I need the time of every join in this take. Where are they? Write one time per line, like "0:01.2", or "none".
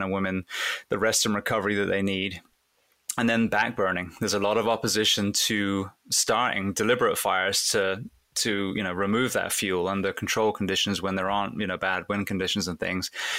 none